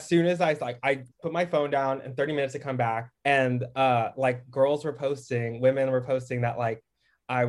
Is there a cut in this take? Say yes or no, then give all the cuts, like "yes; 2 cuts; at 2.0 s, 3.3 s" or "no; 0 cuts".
yes; 2 cuts; at 1.1 s, 3.1 s